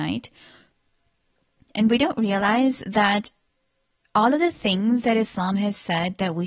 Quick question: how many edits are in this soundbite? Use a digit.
0